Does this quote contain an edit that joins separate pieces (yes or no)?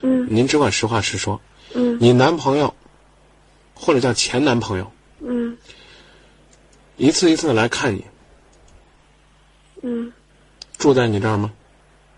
no